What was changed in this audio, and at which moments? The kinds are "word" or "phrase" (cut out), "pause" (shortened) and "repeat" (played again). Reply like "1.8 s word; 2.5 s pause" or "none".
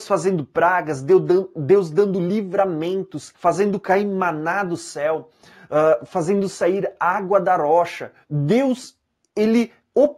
3.3 s phrase; 8.2 s pause